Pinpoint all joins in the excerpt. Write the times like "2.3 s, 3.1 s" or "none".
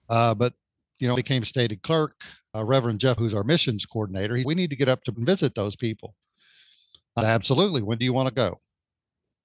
1.1 s, 2.5 s, 3.2 s, 4.4 s, 5.1 s, 7.2 s